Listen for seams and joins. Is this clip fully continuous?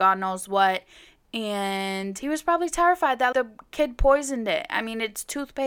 no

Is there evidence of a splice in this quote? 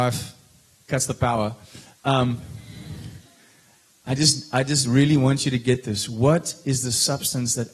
no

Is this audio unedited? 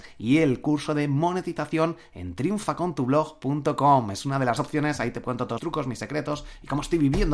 no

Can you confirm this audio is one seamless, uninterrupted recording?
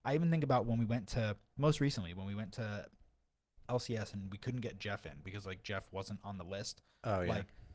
no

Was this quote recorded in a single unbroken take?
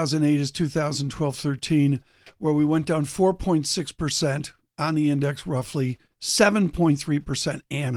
yes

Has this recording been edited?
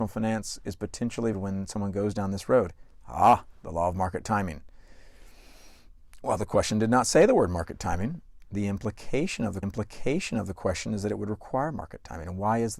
yes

